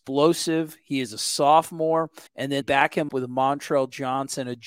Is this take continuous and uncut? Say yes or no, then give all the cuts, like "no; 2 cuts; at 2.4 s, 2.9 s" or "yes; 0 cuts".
no; 3 cuts; at 2.3 s, 2.6 s, 3.1 s